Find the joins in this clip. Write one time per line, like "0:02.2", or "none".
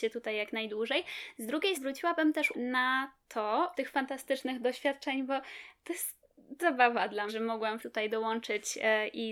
0:01.7
0:02.5
0:03.7
0:06.6
0:07.3
0:07.8

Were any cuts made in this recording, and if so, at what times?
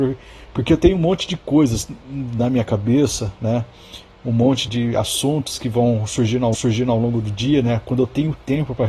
0:04.7
0:06.5

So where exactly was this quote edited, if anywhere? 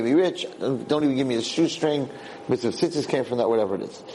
none

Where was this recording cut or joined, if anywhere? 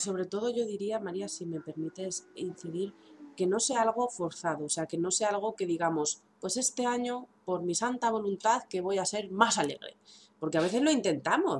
none

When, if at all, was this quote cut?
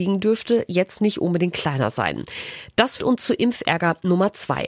0:03.0

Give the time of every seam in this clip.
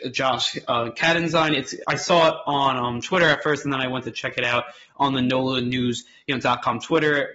none

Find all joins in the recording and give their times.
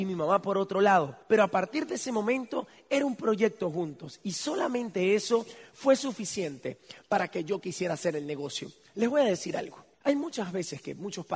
0:01.2
0:09.9

